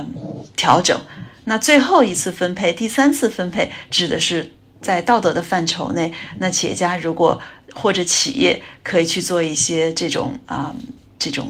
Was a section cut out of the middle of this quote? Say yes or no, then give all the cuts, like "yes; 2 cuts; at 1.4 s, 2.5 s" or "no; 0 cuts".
no; 0 cuts